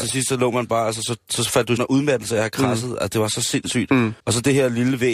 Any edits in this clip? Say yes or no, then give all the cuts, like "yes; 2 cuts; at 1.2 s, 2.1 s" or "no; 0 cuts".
yes; 2 cuts; at 1.8 s, 4.2 s